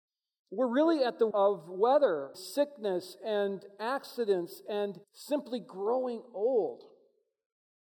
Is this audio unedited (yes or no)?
no